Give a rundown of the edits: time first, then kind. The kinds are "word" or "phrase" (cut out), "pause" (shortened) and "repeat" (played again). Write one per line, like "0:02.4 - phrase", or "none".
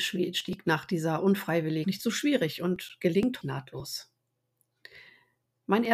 0:01.8 - phrase
0:03.4 - word